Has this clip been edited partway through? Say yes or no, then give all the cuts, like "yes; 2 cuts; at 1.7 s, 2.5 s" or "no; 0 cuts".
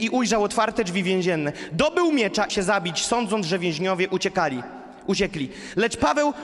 yes; 1 cut; at 2.5 s